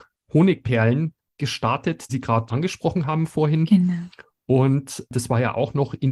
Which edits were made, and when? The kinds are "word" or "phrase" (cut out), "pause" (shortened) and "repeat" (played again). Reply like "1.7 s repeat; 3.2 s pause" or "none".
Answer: 2.1 s word; 2.5 s word